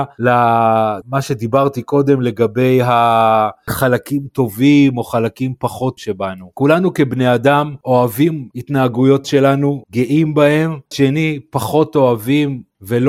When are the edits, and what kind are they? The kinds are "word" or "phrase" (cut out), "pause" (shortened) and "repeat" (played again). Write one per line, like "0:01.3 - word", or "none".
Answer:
0:06.0 - word
0:09.2 - word
0:10.9 - word